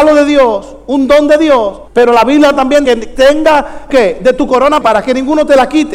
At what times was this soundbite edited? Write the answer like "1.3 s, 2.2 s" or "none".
1.9 s, 2.9 s, 3.9 s, 4.8 s